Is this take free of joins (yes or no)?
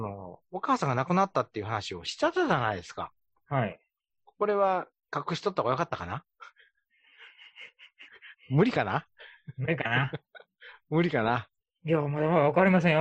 yes